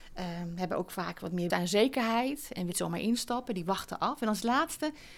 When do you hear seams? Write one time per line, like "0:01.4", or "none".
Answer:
0:01.5
0:02.7